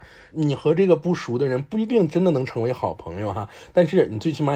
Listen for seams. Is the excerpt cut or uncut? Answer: uncut